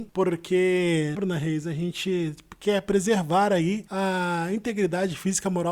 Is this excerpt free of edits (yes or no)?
no